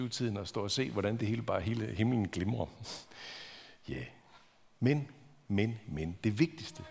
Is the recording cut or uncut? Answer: uncut